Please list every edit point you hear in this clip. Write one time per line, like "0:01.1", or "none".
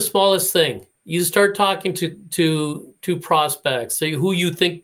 0:01.0